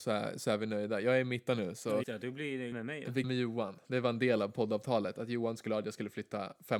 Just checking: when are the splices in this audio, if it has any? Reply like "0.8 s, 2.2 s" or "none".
1.5 s, 2.0 s, 2.7 s, 3.2 s